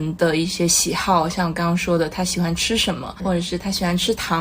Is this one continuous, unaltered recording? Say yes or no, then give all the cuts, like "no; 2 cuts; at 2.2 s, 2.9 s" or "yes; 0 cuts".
no; 1 cut; at 3.2 s